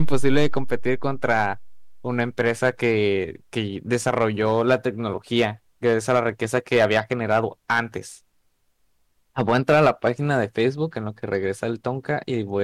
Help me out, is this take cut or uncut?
uncut